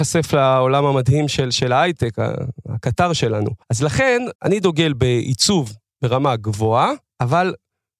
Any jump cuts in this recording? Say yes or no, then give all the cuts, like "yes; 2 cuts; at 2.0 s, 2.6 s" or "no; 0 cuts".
yes; 2 cuts; at 3.6 s, 4.4 s